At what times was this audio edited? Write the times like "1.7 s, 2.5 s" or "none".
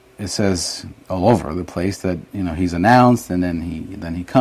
none